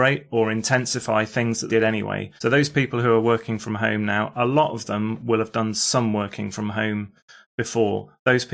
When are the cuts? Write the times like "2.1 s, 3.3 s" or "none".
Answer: 1.7 s, 2.4 s